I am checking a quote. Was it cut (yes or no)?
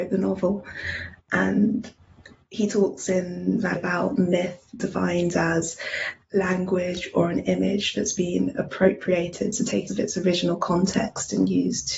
yes